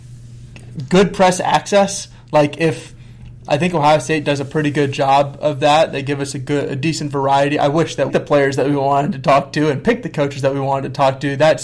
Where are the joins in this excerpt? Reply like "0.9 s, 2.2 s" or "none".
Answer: 3.5 s, 8.1 s